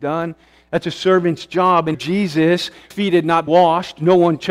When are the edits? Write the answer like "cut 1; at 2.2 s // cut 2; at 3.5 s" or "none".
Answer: cut 1; at 1.9 s // cut 2; at 2.9 s // cut 3; at 3.5 s